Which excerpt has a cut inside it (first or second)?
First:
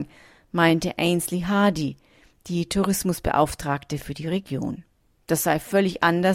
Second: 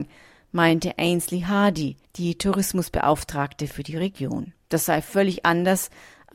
second